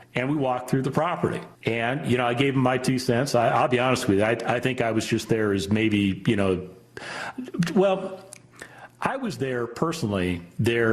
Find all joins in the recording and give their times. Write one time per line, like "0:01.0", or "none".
0:01.5